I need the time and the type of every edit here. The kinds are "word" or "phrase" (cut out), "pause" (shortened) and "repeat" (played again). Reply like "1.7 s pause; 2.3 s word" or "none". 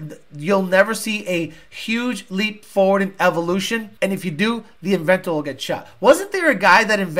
4.0 s pause